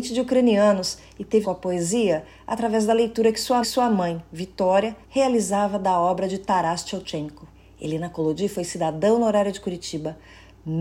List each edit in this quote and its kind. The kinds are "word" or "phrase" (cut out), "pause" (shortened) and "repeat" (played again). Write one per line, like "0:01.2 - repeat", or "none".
0:01.4 - phrase
0:03.6 - repeat
0:05.0 - pause
0:07.5 - pause